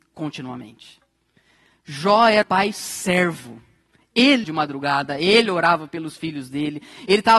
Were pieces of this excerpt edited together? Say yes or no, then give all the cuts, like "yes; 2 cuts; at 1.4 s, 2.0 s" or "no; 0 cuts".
yes; 2 cuts; at 2.4 s, 4.4 s